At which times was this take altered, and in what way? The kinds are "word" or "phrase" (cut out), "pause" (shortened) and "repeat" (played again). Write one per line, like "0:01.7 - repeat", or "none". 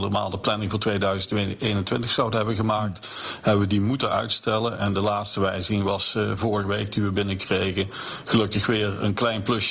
none